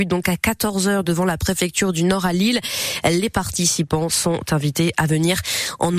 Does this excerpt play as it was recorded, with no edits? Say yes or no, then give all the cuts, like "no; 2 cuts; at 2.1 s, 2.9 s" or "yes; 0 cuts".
yes; 0 cuts